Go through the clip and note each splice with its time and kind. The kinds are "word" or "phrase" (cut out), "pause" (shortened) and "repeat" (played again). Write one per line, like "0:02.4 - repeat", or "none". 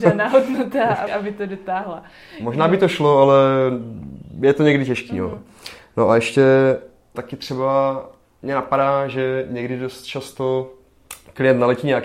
0:01.1 - word
0:07.1 - word

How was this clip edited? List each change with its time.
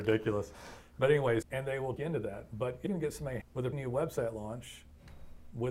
0:01.4 - word
0:02.0 - word
0:02.9 - word
0:03.4 - word
0:03.7 - word

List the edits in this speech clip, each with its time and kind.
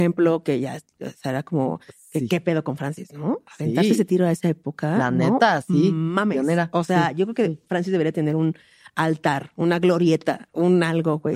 none

